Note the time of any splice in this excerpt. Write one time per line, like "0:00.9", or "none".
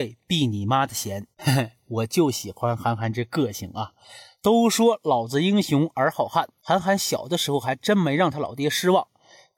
0:01.3